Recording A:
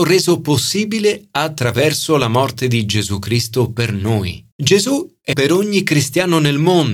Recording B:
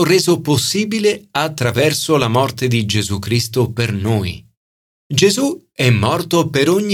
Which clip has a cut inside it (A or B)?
A